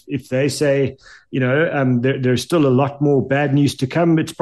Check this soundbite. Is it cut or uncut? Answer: uncut